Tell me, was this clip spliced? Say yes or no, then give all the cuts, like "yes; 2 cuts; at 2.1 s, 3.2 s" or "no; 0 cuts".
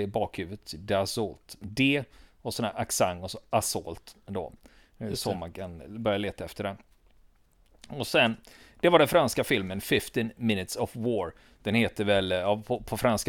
no; 0 cuts